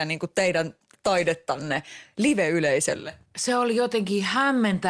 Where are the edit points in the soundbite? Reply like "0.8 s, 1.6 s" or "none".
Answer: none